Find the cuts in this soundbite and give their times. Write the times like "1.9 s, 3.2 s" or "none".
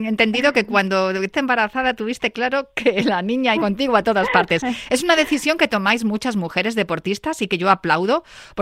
1.3 s, 3.6 s